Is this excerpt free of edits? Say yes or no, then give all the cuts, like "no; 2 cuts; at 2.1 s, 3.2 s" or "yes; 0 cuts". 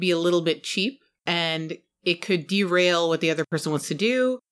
yes; 0 cuts